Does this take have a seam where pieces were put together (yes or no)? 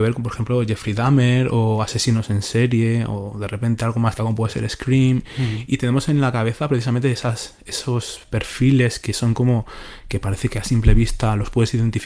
yes